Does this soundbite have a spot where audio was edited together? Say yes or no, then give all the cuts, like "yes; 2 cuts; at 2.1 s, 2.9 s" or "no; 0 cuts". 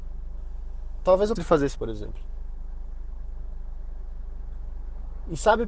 yes; 2 cuts; at 1.4 s, 1.8 s